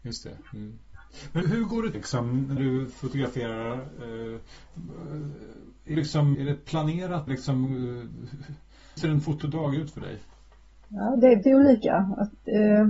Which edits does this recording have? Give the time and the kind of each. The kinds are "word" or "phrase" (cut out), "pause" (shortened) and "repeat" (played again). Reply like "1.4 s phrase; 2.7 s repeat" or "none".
1.4 s word; 1.9 s word; 2.6 s word; 5.9 s word; 6.3 s word; 7.3 s word; 9.0 s word; 11.4 s word